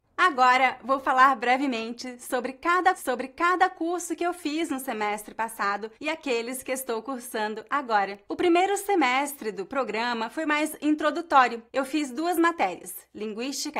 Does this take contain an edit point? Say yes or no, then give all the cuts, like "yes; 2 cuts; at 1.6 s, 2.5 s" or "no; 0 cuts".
yes; 4 cuts; at 2.9 s, 5.9 s, 8.3 s, 11.7 s